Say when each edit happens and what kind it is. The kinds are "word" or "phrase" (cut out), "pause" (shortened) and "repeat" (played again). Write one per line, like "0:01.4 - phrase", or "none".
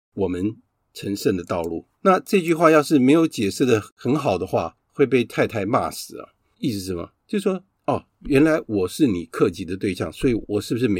0:01.9 - pause
0:04.8 - pause
0:07.2 - pause